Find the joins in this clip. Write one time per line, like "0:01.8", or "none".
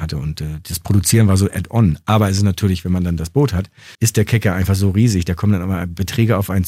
0:03.9

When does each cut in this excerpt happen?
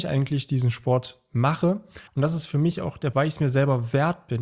0:02.1
0:03.1

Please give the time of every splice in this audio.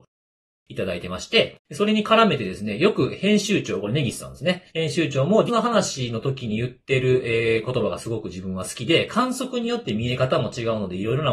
0:01.6
0:04.7
0:05.5

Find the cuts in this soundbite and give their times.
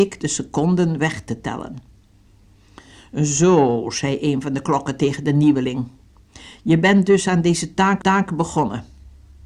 0:08.0

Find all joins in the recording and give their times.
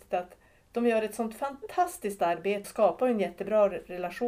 0:02.6

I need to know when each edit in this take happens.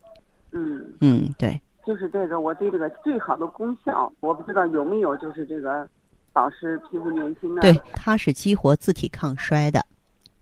0:04.2

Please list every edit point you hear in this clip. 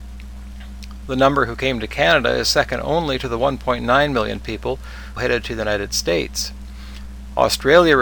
0:05.2

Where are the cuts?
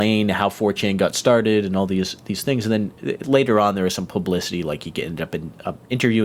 none

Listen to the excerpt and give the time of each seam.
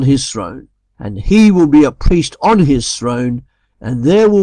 none

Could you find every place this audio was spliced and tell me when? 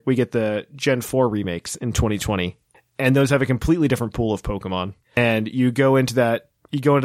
0:05.0

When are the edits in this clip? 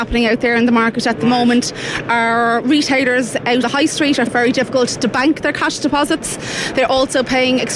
0:03.6
0:04.3

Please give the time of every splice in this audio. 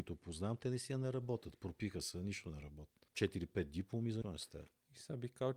0:03.1
0:04.2

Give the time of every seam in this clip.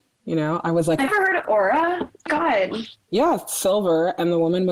0:01.1
0:01.4
0:02.3

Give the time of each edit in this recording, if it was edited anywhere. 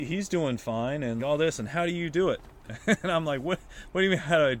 0:01.2

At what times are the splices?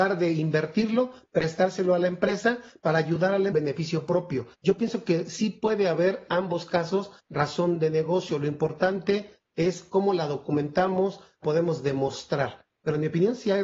0:03.5
0:04.5
0:06.3
0:07.2
0:11.4

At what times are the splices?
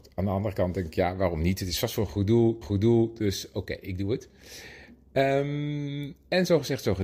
0:02.6

